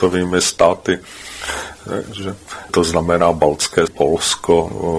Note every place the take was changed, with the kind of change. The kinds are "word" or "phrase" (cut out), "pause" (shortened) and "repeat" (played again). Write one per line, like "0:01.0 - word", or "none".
0:02.7 - word
0:03.9 - word